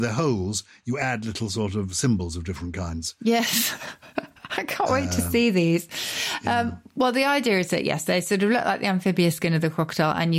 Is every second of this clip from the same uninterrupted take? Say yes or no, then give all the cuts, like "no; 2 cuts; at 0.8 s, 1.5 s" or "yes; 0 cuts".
yes; 0 cuts